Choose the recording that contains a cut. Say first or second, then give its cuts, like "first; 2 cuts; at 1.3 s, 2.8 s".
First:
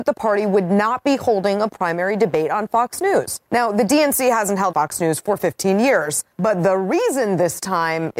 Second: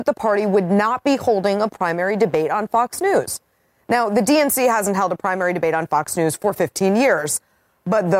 first; 3 cuts; at 3.5 s, 4.7 s, 6.3 s